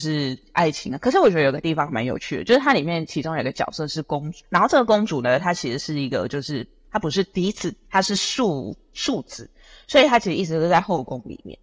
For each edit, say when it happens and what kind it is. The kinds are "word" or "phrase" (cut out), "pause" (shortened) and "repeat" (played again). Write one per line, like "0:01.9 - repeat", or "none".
none